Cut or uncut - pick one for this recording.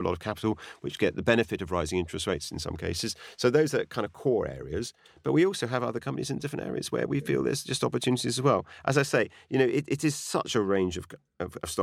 uncut